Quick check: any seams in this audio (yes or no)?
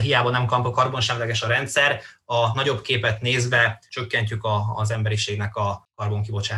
no